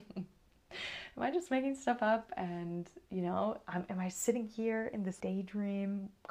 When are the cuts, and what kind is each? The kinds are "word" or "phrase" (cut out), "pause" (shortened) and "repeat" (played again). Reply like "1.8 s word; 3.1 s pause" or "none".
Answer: 5.2 s word